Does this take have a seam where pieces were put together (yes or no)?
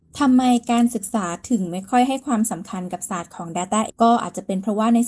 yes